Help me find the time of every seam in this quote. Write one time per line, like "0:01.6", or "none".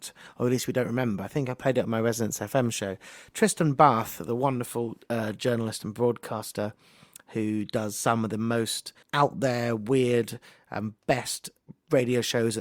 0:09.0